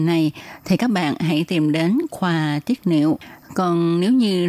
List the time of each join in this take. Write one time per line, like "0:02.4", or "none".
none